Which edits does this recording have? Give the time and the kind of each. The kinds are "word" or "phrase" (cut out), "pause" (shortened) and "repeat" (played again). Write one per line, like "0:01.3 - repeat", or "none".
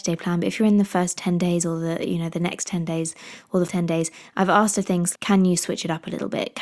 0:03.7 - word
0:05.1 - word